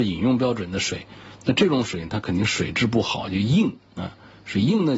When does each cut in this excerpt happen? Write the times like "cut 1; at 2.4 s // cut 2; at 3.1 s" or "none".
cut 1; at 3.8 s